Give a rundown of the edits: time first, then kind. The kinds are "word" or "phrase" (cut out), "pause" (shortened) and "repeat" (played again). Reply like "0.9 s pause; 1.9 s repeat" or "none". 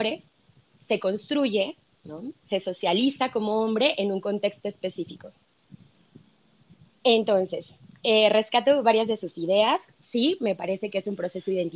none